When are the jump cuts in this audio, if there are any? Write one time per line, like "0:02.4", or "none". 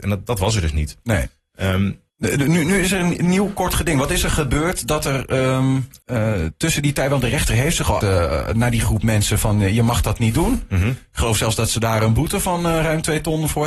0:02.1
0:06.0
0:08.0